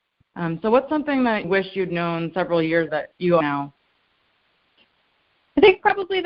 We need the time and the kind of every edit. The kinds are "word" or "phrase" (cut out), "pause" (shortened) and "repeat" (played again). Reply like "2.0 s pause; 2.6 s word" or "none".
1.4 s word; 2.9 s word; 3.4 s word